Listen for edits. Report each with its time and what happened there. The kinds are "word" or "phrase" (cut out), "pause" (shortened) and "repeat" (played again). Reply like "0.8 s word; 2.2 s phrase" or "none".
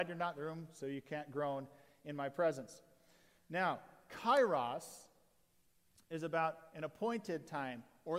none